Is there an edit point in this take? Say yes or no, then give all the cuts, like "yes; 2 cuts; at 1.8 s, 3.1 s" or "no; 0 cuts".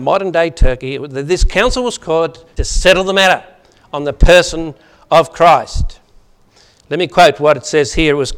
yes; 1 cut; at 2.6 s